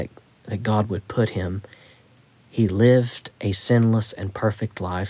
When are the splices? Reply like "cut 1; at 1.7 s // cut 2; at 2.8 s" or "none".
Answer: none